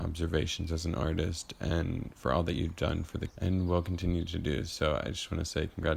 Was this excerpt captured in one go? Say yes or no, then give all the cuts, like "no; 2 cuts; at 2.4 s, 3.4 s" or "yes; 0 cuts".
no; 1 cut; at 3.3 s